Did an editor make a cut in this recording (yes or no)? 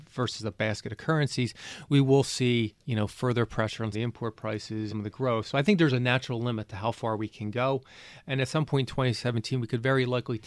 yes